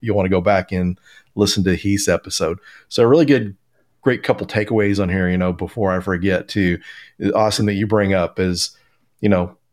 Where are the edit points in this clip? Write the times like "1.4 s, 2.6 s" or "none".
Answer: none